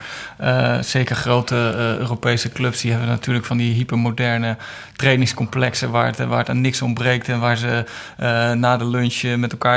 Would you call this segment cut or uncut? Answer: uncut